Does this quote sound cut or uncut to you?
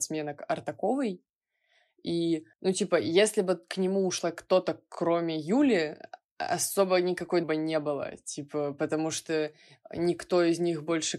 cut